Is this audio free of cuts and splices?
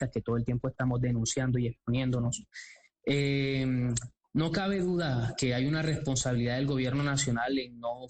yes; 0 cuts

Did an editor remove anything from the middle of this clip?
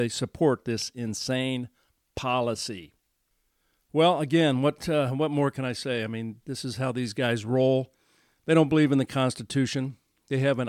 no; 0 cuts

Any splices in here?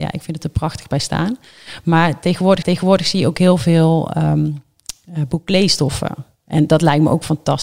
yes; 1 cut; at 2.6 s

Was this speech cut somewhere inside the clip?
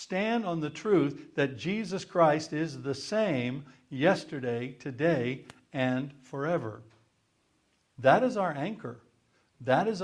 no; 0 cuts

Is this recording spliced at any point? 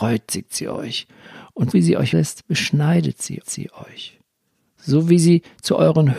yes; 3 cuts; at 1.7 s, 2.1 s, 3.4 s

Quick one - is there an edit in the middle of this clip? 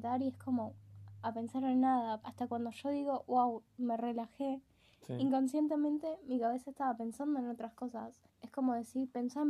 yes; 2 cuts; at 2.2 s, 8.3 s

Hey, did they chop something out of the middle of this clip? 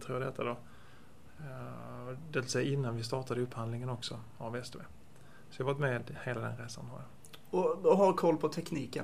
no; 0 cuts

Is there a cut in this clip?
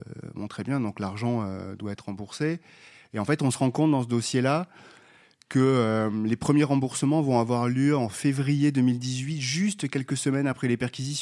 no; 0 cuts

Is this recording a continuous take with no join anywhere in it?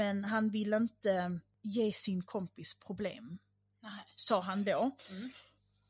yes; 0 cuts

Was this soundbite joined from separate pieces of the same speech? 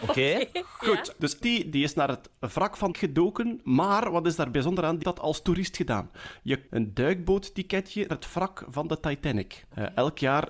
yes; 5 cuts; at 1.4 s, 2.9 s, 5.0 s, 6.7 s, 8.1 s

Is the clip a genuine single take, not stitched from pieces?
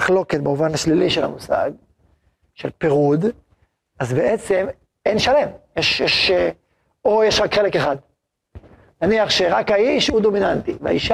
yes; 0 cuts

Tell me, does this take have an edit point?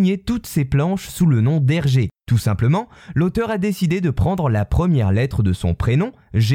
yes; 1 cut; at 2.2 s

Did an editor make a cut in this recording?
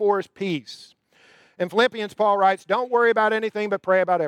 no; 0 cuts

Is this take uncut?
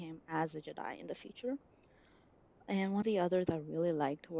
no; 2 cuts; at 3.0 s, 3.5 s

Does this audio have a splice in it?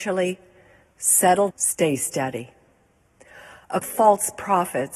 yes; 2 cuts; at 1.5 s, 3.8 s

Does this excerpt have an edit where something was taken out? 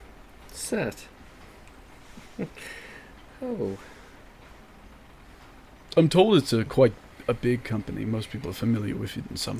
no; 0 cuts

